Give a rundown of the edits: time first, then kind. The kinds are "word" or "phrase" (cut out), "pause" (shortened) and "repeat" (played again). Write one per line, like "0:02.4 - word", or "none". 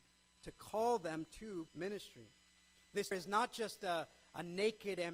0:01.7 - word
0:03.1 - word